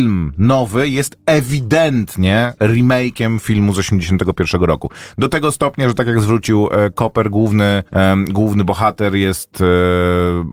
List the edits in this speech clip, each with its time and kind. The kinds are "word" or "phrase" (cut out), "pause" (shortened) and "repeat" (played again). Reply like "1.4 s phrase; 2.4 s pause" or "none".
2.6 s pause; 7.9 s pause

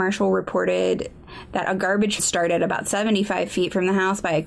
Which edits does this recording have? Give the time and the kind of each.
2.2 s phrase

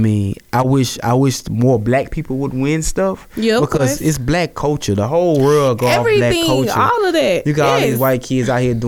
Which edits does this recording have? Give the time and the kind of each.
none

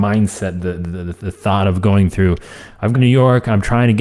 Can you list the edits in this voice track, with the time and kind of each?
2.9 s word

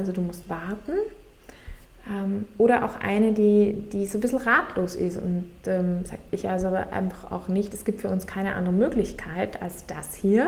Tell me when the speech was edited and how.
6.3 s pause

